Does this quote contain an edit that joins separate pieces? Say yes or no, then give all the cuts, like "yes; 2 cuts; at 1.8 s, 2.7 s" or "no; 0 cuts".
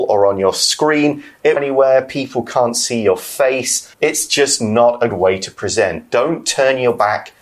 yes; 3 cuts; at 1.6 s, 3.9 s, 5.1 s